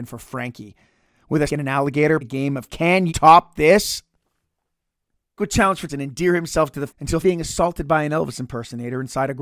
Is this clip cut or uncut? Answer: cut